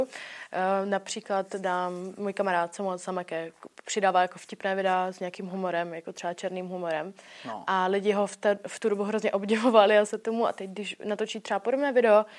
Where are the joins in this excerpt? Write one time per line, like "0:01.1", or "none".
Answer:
0:10.1